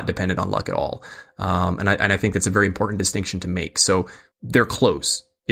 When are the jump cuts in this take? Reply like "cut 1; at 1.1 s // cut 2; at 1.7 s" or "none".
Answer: cut 1; at 4.3 s